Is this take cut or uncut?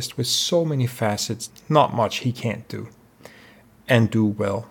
cut